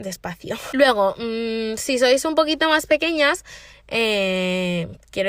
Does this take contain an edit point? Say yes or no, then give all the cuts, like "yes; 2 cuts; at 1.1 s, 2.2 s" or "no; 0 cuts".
no; 0 cuts